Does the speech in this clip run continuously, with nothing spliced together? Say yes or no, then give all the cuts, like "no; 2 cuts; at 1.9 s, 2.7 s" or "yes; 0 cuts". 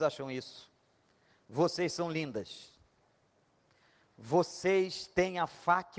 yes; 0 cuts